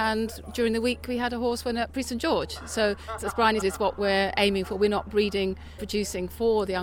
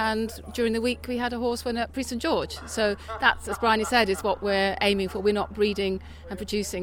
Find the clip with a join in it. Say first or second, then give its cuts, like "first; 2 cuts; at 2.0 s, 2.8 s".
first; 3 cuts; at 3.2 s, 3.6 s, 5.8 s